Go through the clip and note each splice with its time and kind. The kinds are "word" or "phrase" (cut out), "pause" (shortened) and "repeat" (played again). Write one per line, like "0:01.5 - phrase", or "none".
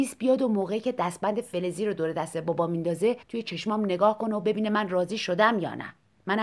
0:03.2 - pause